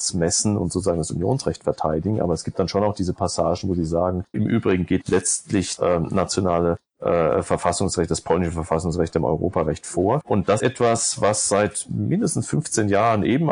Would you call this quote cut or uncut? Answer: cut